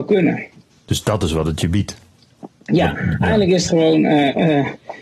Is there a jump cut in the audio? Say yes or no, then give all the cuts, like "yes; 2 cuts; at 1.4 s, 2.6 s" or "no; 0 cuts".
no; 0 cuts